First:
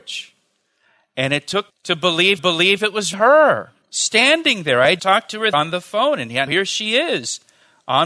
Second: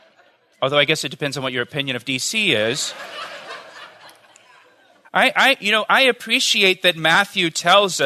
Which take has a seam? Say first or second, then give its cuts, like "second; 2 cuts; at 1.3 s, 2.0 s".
first; 7 cuts; at 1.7 s, 2.4 s, 3.1 s, 3.8 s, 5.0 s, 5.5 s, 6.5 s